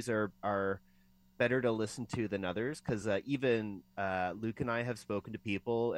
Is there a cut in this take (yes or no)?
no